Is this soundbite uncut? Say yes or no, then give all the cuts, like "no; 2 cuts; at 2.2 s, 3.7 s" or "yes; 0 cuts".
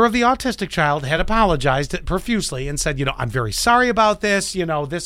yes; 0 cuts